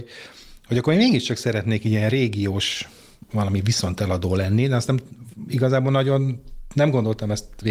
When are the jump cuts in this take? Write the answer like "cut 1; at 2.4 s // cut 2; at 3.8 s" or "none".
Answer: none